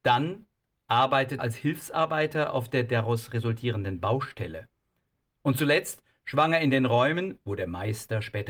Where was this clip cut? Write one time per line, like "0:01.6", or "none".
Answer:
0:01.4